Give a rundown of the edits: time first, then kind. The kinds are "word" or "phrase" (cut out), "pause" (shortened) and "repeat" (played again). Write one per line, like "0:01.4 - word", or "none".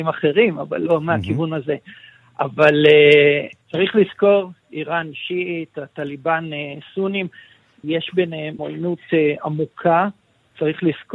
0:03.6 - pause
0:07.8 - word
0:08.6 - phrase